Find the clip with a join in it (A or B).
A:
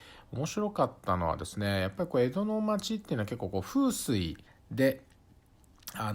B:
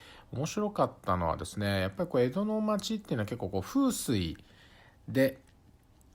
A